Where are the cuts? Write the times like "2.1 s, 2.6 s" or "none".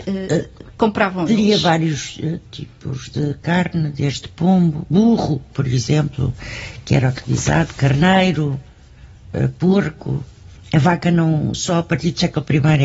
none